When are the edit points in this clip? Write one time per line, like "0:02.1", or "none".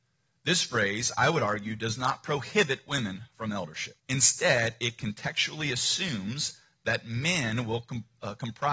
0:04.0